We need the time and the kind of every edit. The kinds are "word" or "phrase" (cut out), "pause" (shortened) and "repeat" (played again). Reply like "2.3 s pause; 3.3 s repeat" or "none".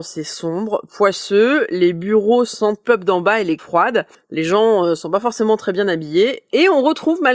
2.8 s phrase; 3.6 s word